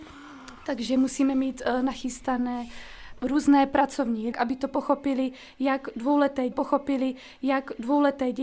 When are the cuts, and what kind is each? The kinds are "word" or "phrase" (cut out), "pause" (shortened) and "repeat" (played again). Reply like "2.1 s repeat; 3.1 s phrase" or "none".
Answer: 4.3 s phrase; 6.5 s repeat